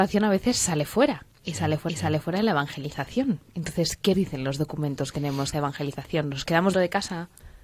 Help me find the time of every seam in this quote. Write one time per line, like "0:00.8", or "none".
0:01.3
0:01.9
0:04.1
0:05.1
0:05.5
0:06.7